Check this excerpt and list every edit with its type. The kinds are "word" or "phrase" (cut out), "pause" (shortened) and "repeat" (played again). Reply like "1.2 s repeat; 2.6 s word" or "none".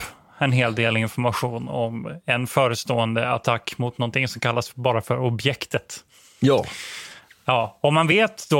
none